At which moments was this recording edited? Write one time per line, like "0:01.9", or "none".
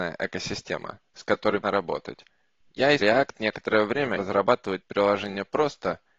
0:01.6
0:03.0
0:04.2